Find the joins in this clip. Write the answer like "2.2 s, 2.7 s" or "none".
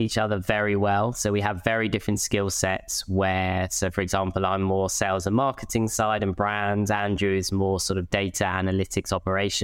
none